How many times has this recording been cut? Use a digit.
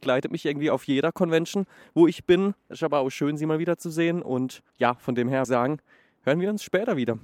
2